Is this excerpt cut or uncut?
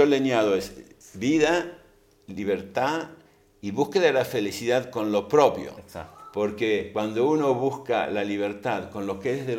uncut